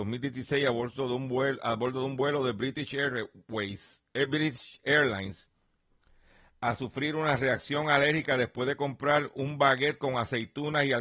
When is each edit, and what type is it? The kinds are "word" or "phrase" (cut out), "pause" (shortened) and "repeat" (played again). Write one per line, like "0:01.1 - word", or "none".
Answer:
none

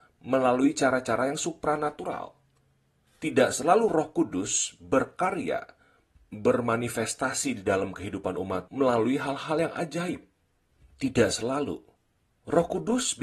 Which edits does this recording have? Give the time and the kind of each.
0:08.7 - word

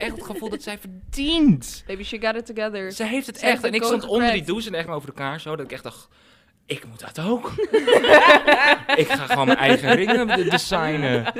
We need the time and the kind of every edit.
0:04.9 - phrase

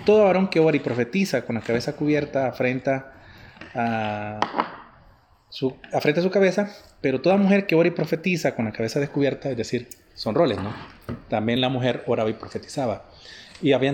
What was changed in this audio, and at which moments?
none

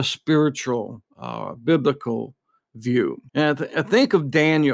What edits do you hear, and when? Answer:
0:01.1 - pause
0:03.3 - pause

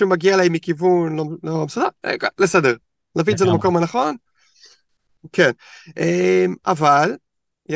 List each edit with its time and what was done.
none

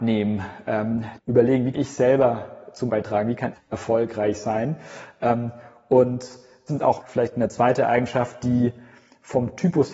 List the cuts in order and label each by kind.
0:01.2 - word
0:01.7 - word
0:02.9 - word
0:03.5 - word
0:06.7 - word
0:07.0 - word

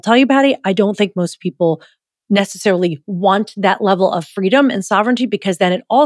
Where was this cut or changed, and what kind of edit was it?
none

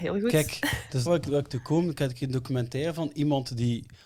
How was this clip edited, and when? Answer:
0:01.1 - word

